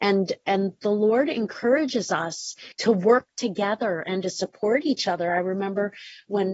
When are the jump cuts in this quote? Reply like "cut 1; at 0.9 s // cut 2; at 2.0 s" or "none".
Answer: cut 1; at 2.7 s